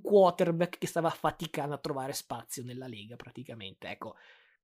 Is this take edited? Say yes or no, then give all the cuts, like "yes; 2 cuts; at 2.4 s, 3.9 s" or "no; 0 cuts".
no; 0 cuts